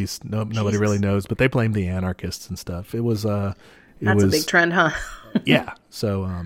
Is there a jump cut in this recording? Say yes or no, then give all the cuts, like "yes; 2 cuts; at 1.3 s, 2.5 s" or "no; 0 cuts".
no; 0 cuts